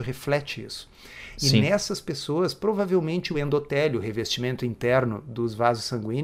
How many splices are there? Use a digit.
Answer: 0